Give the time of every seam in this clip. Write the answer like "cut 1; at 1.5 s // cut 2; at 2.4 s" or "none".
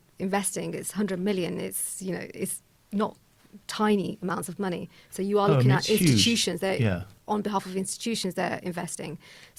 cut 1; at 3.6 s